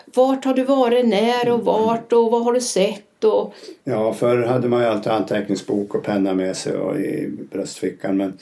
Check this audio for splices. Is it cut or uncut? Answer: cut